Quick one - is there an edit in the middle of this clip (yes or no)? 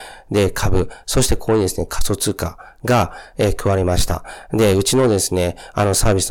no